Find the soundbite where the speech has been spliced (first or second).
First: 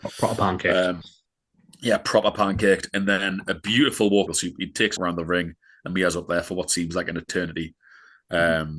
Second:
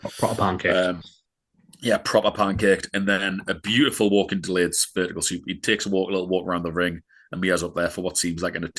first